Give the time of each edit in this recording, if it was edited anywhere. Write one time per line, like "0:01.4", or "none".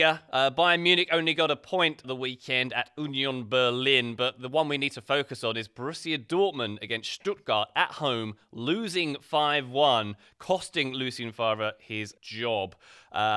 0:02.0
0:12.2